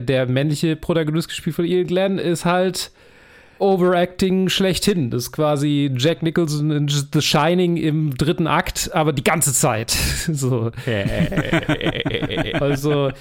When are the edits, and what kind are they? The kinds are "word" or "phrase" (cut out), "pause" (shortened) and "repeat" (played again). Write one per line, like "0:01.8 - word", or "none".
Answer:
none